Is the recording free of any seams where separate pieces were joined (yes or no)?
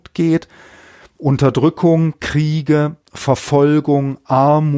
no